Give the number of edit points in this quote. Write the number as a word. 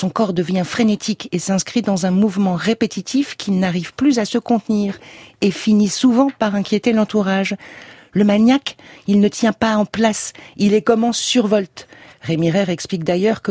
zero